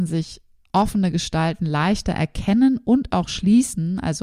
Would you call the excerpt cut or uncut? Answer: uncut